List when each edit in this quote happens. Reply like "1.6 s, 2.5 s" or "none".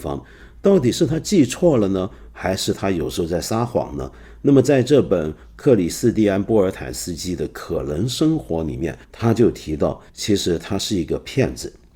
9.0 s, 10.1 s